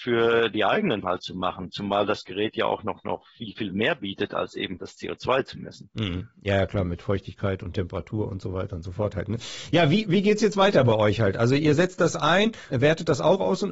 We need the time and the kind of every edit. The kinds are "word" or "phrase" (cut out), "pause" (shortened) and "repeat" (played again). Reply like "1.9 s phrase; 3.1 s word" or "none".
1.0 s phrase; 4.8 s word; 12.7 s word